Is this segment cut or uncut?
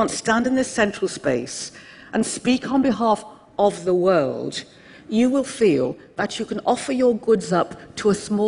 uncut